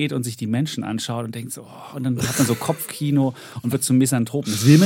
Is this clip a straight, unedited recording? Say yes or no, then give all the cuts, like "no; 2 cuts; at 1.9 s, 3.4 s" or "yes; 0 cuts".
yes; 0 cuts